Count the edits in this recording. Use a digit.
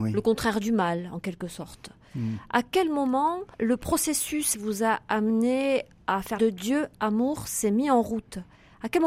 3